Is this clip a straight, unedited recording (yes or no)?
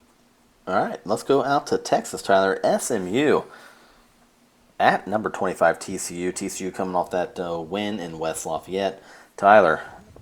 yes